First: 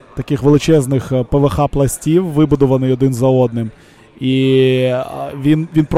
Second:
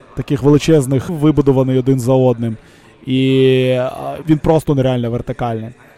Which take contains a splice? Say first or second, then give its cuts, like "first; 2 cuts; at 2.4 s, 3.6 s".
second; 2 cuts; at 1.1 s, 4.2 s